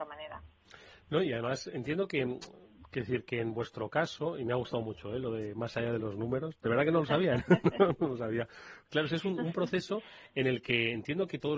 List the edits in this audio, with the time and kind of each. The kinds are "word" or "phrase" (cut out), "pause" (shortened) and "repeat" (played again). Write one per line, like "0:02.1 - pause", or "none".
none